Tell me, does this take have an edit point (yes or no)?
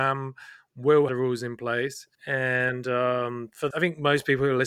yes